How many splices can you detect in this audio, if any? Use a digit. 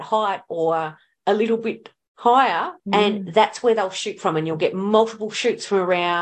0